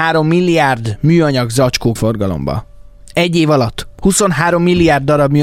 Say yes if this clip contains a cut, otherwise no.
yes